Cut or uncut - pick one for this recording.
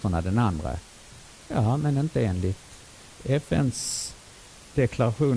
uncut